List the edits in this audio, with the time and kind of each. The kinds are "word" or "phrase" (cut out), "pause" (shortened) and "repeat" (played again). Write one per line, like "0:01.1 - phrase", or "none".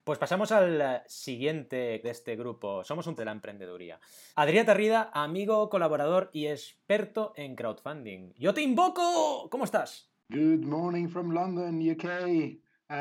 0:02.0 - word
0:03.2 - phrase
0:04.3 - pause